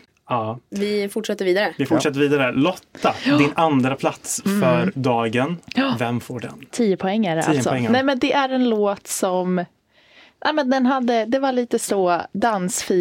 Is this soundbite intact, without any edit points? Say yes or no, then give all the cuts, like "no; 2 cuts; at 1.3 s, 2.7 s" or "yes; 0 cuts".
yes; 0 cuts